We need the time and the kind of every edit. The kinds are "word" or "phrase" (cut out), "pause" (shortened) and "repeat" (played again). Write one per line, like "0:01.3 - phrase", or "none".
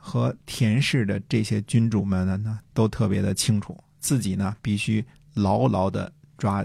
none